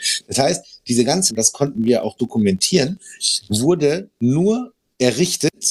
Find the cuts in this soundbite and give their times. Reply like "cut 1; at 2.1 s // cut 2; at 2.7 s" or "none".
cut 1; at 1.3 s // cut 2; at 4.1 s